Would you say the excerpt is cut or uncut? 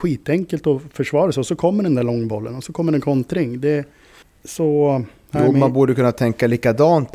cut